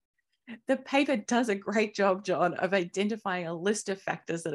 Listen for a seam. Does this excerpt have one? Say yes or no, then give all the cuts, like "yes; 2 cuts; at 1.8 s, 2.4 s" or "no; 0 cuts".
no; 0 cuts